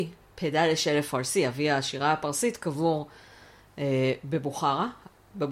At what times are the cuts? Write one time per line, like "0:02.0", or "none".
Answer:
none